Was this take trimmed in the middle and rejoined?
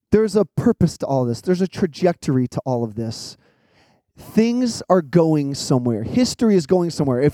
no; 0 cuts

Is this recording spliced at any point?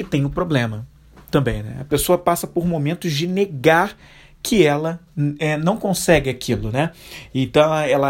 no; 0 cuts

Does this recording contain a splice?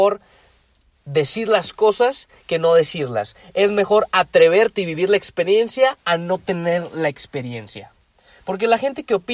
no; 0 cuts

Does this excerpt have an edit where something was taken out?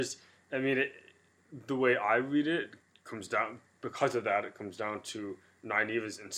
yes; 1 cut; at 2.8 s

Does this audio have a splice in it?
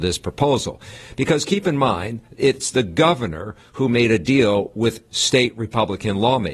no; 0 cuts

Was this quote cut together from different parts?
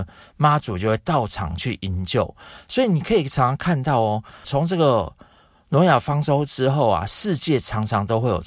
yes; 1 cut; at 4.4 s

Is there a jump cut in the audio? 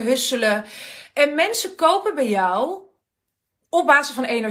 no; 0 cuts

